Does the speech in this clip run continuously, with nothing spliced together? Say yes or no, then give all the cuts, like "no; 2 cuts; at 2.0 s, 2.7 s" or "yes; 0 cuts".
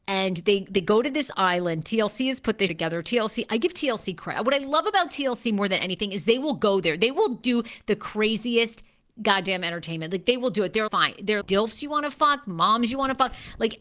no; 3 cuts; at 2.7 s, 10.9 s, 11.4 s